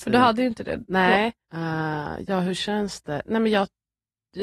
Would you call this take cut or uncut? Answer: cut